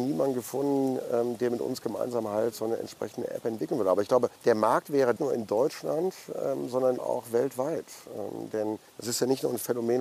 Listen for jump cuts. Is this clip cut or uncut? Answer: cut